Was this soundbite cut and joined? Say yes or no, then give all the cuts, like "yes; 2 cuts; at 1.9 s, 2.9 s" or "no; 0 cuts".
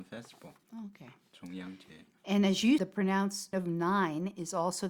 yes; 2 cuts; at 2.8 s, 3.5 s